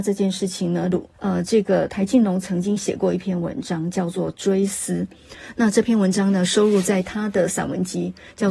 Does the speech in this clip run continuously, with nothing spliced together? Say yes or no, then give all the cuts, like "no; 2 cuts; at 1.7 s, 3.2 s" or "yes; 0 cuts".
no; 1 cut; at 1.1 s